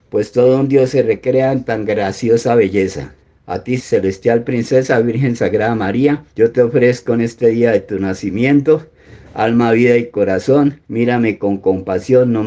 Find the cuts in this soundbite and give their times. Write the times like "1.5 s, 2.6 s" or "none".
3.2 s, 6.3 s, 10.8 s

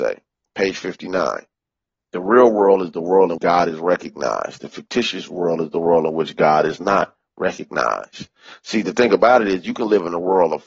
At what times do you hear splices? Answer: 3.4 s

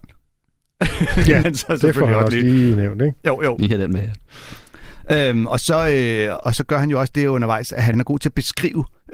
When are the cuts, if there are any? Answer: 1.4 s, 6.4 s, 7.9 s

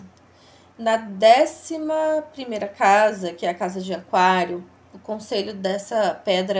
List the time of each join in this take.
none

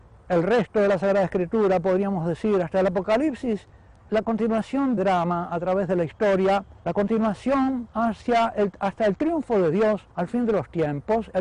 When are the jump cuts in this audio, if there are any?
4.1 s, 5.0 s, 6.8 s, 10.1 s

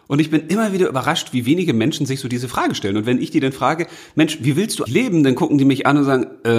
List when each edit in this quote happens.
4.9 s

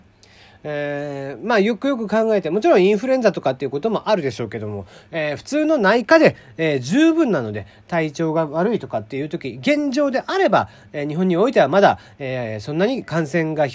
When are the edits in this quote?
none

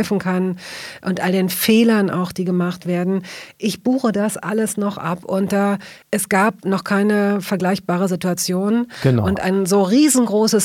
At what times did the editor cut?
6.0 s

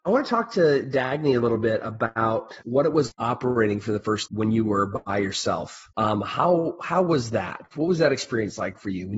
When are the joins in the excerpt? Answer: 2.6 s, 3.1 s, 4.3 s, 5.9 s

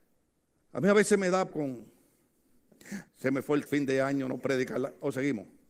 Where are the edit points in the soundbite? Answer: 1.5 s, 3.1 s, 3.7 s, 4.4 s

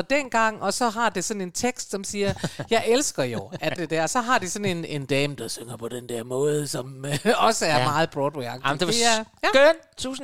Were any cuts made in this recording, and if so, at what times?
3.8 s

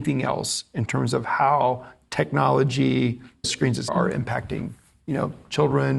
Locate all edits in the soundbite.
3.4 s, 3.9 s

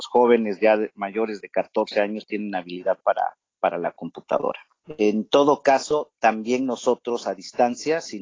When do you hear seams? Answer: none

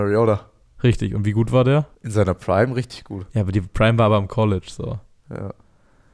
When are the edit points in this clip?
1.9 s

